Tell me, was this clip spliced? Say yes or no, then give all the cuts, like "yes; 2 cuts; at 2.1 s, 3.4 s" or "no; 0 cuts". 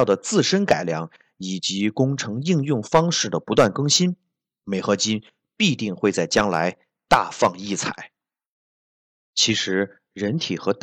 no; 0 cuts